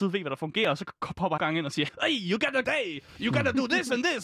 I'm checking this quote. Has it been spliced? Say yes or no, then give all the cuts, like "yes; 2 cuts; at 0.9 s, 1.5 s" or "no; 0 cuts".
yes; 3 cuts; at 1.4 s, 1.9 s, 2.6 s